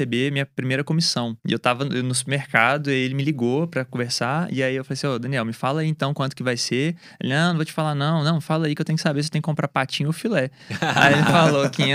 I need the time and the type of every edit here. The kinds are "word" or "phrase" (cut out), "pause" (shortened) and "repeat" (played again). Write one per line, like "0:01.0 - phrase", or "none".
0:01.4 - pause

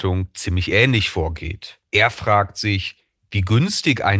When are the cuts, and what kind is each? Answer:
0:01.9 - pause

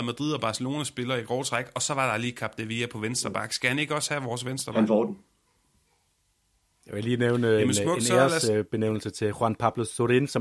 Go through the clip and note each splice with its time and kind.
none

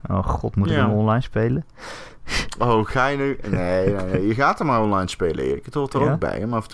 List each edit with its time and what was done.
none

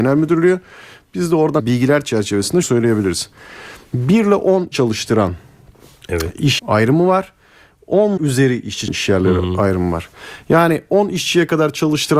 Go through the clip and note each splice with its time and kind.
0:01.6 - word
0:02.6 - word
0:04.7 - word
0:06.6 - word
0:08.2 - word
0:08.9 - word

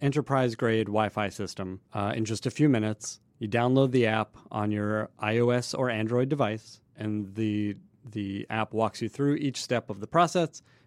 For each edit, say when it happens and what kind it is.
0:01.9 - pause
0:03.3 - pause
0:06.9 - pause

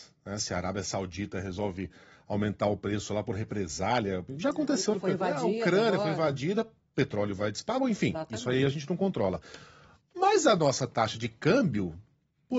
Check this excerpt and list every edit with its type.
0:04.9 - phrase

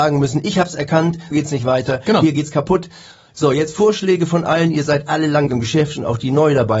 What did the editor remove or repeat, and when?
0:01.3 - word
0:05.5 - word

